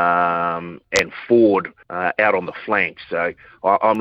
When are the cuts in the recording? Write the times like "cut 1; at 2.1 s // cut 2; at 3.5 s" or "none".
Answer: cut 1; at 1.8 s